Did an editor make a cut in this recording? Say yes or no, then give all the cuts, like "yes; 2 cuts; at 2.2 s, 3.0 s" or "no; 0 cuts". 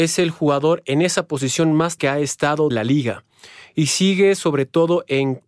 yes; 2 cuts; at 2.0 s, 2.7 s